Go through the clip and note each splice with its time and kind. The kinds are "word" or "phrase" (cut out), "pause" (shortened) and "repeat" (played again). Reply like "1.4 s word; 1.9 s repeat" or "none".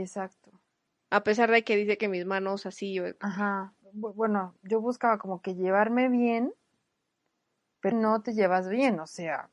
7.9 s word